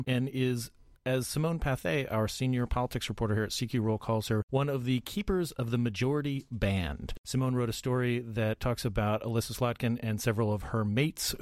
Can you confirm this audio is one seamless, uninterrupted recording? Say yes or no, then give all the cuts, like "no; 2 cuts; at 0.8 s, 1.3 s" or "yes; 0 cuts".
no; 1 cut; at 4.0 s